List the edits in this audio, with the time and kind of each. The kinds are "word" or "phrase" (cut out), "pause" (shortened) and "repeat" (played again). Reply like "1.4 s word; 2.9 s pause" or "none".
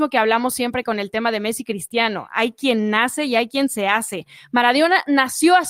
none